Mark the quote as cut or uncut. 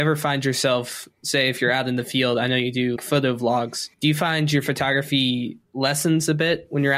cut